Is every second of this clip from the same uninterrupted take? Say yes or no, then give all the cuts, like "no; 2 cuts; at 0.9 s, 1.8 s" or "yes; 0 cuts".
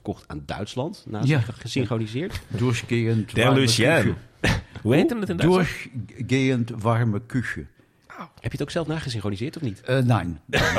yes; 0 cuts